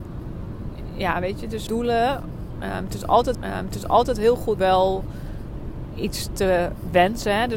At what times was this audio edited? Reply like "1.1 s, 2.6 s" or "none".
1.7 s, 3.3 s, 4.6 s